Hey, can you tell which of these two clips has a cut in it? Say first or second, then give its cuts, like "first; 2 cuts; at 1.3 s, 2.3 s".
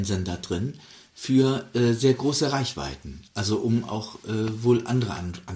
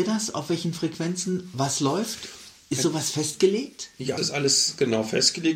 second; 1 cut; at 4.2 s